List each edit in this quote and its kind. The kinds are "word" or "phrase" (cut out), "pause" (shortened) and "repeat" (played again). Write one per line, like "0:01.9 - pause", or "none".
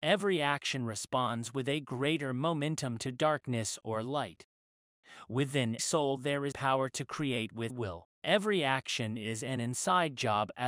0:05.8 - word
0:06.5 - word
0:07.7 - word
0:08.1 - pause